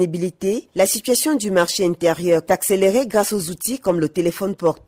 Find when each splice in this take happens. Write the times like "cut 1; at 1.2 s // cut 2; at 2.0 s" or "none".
cut 1; at 2.5 s